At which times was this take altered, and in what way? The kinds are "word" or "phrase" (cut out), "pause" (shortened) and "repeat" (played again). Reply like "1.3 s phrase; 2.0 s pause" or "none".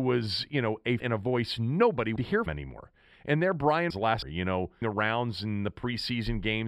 1.0 s word; 2.2 s word; 2.5 s word; 3.9 s word; 4.2 s word; 4.8 s word